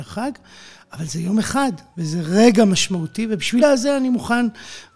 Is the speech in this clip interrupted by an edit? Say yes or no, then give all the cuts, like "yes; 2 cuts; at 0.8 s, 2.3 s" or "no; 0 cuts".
yes; 2 cuts; at 1.9 s, 3.6 s